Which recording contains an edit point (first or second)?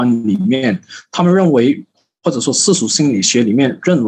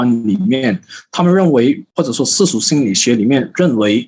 second